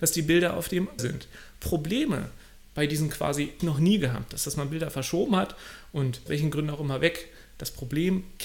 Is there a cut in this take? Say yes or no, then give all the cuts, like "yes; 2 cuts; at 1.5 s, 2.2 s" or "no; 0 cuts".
yes; 4 cuts; at 1.0 s, 3.6 s, 4.4 s, 6.3 s